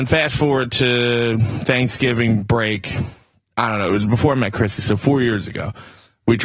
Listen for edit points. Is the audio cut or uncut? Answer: uncut